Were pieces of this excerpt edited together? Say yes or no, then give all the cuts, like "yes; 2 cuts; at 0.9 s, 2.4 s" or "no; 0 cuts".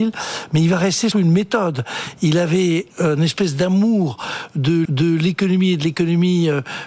yes; 3 cuts; at 1.1 s, 2.9 s, 4.9 s